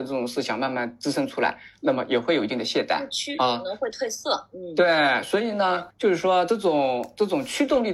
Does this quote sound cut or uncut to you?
cut